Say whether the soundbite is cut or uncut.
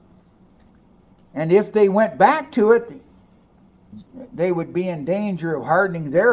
uncut